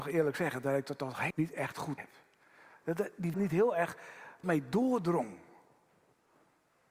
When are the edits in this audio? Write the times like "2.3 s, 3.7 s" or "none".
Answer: 1.3 s, 2.0 s, 3.3 s, 4.4 s

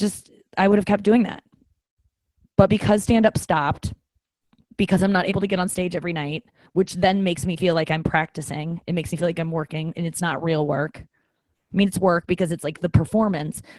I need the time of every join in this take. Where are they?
none

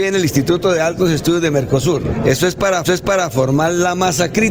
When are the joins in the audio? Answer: 2.8 s

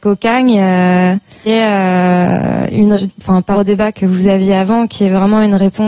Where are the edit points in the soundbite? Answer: 1.5 s, 3.0 s, 3.5 s, 3.9 s

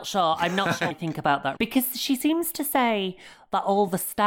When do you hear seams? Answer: 0.9 s, 1.6 s

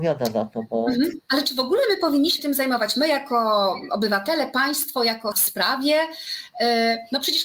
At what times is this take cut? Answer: 2.4 s, 5.3 s

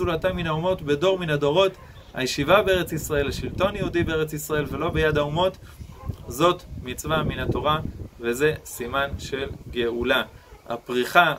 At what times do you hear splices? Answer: none

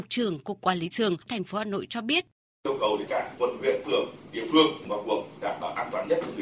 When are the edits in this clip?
0.9 s, 3.1 s, 3.4 s, 3.8 s, 4.9 s

